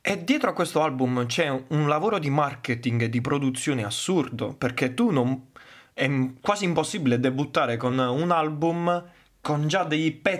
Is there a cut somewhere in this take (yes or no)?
no